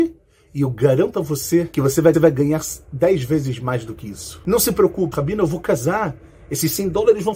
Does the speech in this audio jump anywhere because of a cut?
yes; 2 cuts; at 2.1 s, 5.1 s

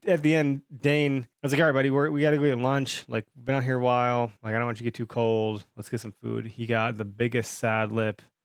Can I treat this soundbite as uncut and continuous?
no; 2 cuts; at 1.3 s, 4.4 s

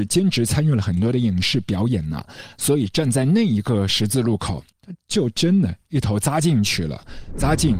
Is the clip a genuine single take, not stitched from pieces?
no; 1 cut; at 4.7 s

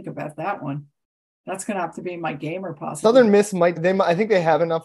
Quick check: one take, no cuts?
no; 1 cut; at 3.8 s

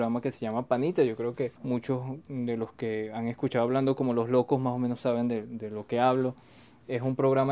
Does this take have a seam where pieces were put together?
yes; 1 cut; at 1.6 s

